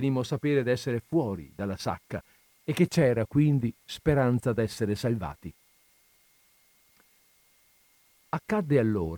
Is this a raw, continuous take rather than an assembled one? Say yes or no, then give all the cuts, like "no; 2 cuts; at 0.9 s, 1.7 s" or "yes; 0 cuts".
yes; 0 cuts